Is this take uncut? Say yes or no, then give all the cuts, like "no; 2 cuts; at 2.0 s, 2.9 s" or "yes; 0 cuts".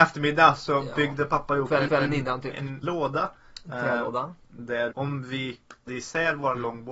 no; 4 cuts; at 1.9 s, 2.8 s, 4.9 s, 5.9 s